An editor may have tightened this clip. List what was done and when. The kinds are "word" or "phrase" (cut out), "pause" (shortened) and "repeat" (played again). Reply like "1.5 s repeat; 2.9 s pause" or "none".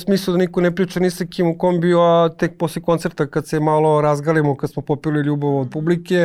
none